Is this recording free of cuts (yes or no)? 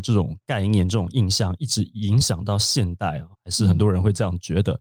no